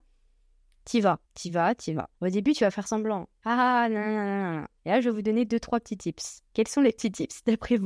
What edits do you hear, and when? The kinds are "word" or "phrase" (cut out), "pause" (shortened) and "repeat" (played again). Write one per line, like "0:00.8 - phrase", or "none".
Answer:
0:01.2 - pause
0:02.2 - pause
0:04.8 - pause
0:06.5 - pause